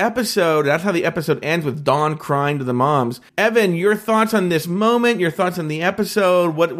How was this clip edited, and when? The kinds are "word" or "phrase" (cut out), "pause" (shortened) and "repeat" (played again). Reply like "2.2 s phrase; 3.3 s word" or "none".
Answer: 3.3 s pause